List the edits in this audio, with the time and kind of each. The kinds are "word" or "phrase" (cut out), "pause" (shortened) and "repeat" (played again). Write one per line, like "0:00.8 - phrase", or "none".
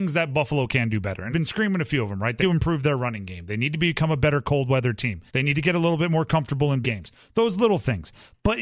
0:01.3 - word
0:02.4 - word
0:05.3 - pause
0:06.8 - word